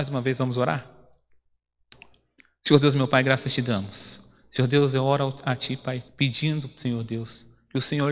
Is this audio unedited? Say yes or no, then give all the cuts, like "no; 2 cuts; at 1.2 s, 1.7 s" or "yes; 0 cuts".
no; 1 cut; at 6.1 s